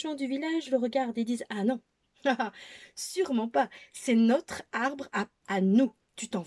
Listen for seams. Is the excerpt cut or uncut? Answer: cut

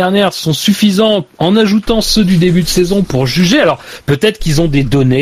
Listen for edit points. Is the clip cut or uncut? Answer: uncut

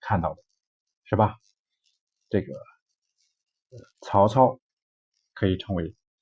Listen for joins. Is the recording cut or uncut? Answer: cut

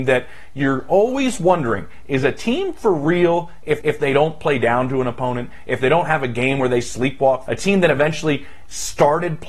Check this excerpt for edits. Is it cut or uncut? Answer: cut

